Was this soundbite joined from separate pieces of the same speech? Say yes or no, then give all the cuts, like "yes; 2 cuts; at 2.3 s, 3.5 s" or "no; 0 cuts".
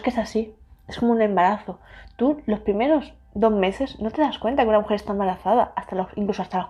no; 0 cuts